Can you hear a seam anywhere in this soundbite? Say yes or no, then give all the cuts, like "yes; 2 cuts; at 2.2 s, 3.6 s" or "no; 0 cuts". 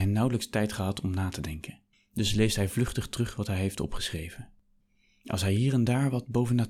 no; 0 cuts